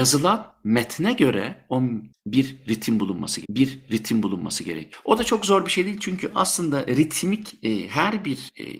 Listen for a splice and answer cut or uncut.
cut